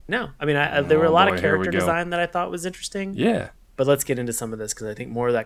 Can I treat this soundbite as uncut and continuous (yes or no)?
yes